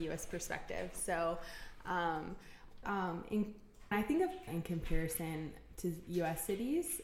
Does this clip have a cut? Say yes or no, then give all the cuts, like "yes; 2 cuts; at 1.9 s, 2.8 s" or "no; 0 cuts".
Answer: yes; 3 cuts; at 2.8 s, 3.9 s, 4.5 s